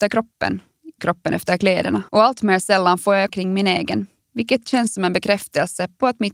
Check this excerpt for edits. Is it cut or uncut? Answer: cut